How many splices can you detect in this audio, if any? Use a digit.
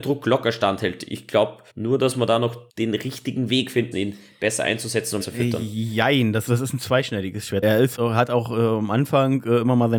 7